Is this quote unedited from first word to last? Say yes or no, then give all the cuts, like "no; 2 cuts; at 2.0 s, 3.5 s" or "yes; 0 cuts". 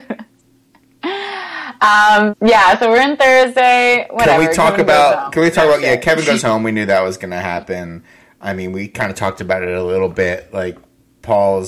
no; 1 cut; at 2.3 s